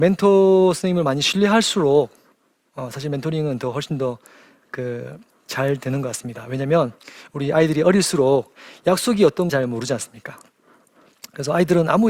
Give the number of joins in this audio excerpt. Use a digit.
1